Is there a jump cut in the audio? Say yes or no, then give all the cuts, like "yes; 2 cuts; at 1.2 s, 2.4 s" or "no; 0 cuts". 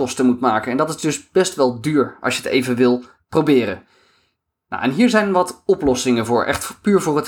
no; 0 cuts